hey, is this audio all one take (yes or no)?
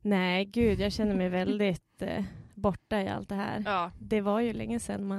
yes